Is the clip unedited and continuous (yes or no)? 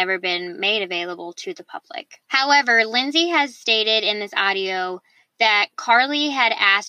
yes